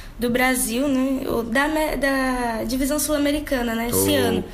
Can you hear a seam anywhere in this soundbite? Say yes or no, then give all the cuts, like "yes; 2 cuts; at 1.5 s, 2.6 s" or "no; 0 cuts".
no; 0 cuts